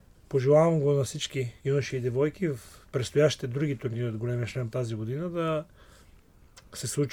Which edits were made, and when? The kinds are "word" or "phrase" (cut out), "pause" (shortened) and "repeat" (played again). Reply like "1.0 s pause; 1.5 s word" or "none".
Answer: 1.6 s pause; 2.8 s pause; 4.7 s word